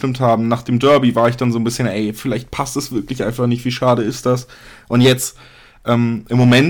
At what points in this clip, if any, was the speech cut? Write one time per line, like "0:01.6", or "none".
none

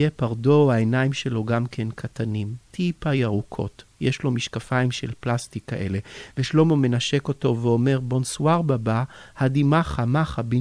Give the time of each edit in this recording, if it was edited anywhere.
none

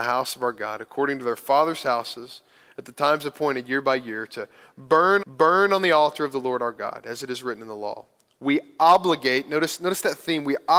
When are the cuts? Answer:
0:05.2

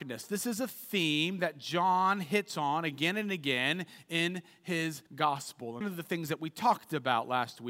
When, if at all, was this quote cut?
0:05.1
0:05.8

